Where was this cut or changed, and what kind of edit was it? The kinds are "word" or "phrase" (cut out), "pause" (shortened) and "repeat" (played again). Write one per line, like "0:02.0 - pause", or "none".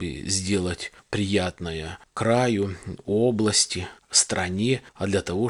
none